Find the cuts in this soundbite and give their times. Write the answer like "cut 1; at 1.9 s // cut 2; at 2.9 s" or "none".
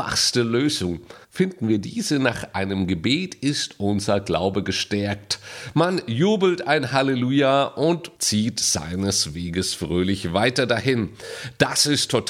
cut 1; at 1.2 s // cut 2; at 8.2 s